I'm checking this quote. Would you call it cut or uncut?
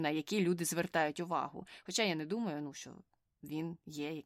uncut